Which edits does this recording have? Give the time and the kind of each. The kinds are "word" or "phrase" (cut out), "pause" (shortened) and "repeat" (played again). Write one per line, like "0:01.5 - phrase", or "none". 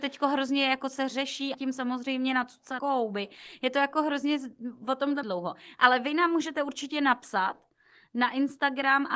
0:01.5 - phrase
0:02.8 - word
0:05.2 - phrase

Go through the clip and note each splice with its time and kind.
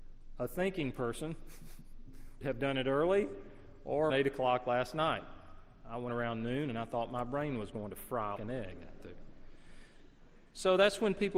0:02.4 - word
0:04.1 - word
0:06.1 - word
0:08.4 - word

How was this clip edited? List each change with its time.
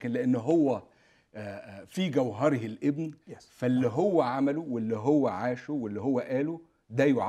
0:03.2 - pause

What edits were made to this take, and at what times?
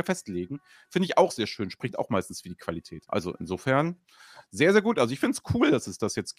none

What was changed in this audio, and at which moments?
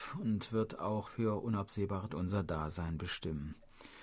0:01.1 - word
0:02.1 - word

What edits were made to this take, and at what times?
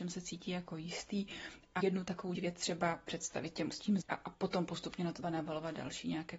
0:01.8 - word
0:02.4 - word
0:03.7 - word
0:04.0 - word
0:05.2 - word

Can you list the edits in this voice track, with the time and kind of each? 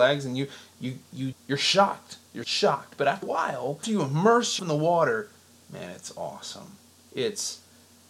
0:01.3 - word
0:02.4 - word
0:03.2 - word
0:03.8 - word
0:04.6 - word

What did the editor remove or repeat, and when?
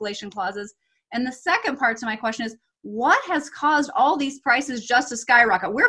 none

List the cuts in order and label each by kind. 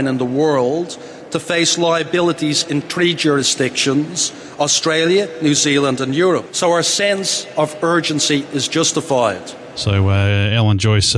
none

